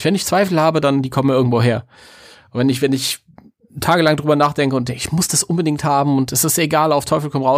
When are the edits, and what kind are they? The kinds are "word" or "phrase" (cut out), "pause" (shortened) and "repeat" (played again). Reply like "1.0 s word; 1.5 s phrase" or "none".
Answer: none